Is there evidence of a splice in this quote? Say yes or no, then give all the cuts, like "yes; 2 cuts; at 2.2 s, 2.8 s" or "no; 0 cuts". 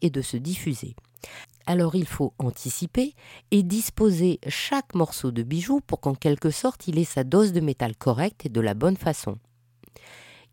no; 0 cuts